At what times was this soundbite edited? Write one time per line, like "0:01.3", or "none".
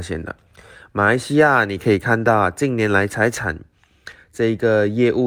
none